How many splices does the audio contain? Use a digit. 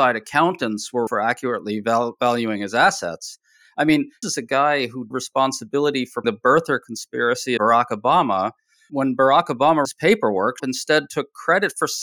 8